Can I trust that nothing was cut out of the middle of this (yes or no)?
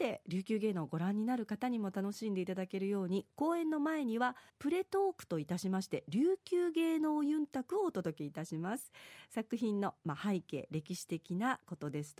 no